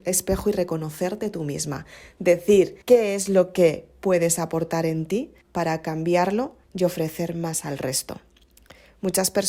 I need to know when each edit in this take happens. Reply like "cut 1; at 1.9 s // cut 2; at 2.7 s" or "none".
cut 1; at 2.8 s // cut 2; at 5.4 s // cut 3; at 6.6 s